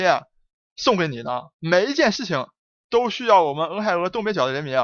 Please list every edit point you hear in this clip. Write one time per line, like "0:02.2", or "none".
0:01.5